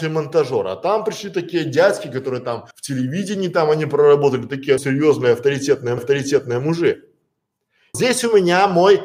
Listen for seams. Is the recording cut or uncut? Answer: cut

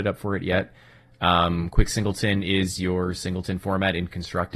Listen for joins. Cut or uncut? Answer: uncut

